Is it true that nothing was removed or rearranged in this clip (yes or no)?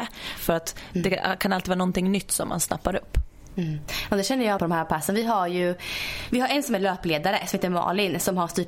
no